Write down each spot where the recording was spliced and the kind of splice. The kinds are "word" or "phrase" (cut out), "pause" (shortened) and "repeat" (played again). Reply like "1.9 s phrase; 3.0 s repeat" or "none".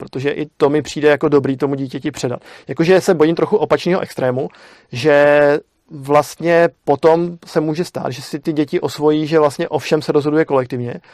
none